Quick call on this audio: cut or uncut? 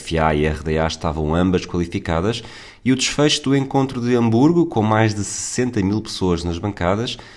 uncut